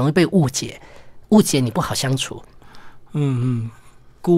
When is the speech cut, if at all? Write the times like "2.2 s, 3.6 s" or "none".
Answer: 1.2 s